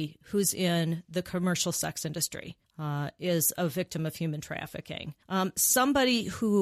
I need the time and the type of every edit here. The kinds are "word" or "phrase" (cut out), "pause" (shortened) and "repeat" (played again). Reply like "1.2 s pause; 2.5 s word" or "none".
2.6 s pause; 5.2 s pause